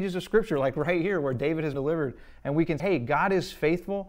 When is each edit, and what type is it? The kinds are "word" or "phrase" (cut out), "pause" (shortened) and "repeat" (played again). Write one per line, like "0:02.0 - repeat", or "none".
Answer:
0:01.7 - word
0:02.8 - word